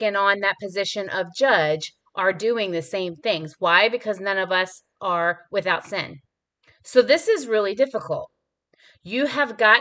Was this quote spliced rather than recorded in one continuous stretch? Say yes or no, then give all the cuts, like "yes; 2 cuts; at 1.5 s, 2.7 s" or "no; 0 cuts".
no; 0 cuts